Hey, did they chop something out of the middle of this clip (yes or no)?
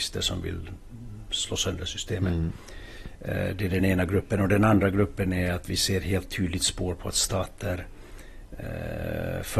no